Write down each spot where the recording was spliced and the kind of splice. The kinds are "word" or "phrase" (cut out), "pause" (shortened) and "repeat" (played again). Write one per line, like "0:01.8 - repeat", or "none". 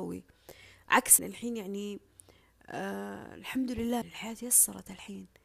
0:01.2 - word
0:04.0 - word